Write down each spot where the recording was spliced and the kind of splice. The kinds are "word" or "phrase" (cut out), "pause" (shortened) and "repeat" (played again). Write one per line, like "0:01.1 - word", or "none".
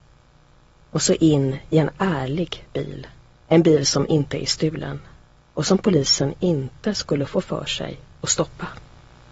none